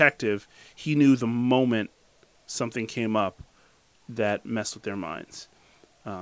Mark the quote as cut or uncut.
uncut